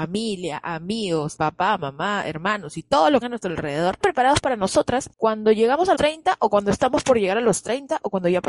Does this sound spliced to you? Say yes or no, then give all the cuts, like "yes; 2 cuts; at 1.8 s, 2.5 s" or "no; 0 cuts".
yes; 4 cuts; at 1.4 s, 3.2 s, 4.0 s, 5.9 s